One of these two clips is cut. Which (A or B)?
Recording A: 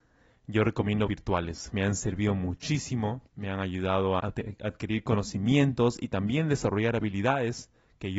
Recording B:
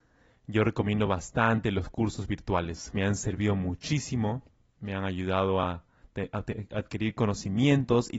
A